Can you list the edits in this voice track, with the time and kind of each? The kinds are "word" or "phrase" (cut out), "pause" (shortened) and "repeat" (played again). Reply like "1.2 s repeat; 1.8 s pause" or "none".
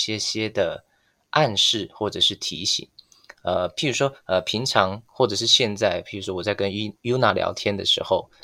none